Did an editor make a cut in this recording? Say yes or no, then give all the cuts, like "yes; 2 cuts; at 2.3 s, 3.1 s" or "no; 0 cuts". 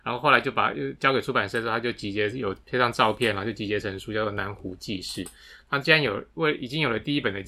no; 0 cuts